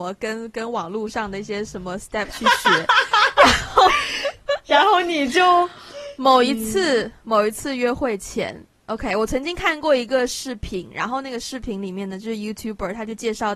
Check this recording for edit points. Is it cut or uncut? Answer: uncut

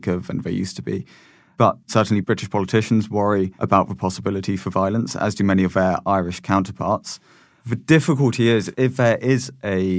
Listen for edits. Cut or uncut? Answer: uncut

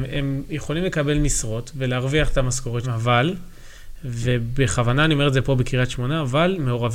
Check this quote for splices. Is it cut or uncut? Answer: cut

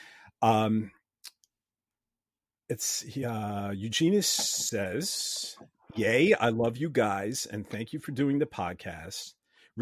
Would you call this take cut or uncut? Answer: uncut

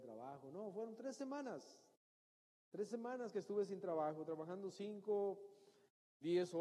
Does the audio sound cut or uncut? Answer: uncut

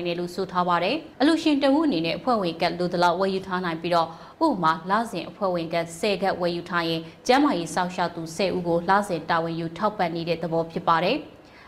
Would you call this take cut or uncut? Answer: cut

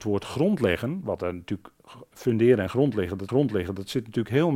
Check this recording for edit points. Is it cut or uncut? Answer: cut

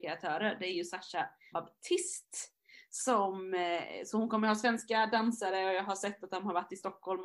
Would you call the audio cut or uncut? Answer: cut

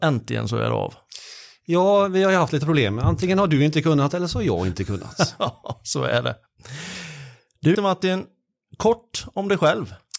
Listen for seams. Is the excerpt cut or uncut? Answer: cut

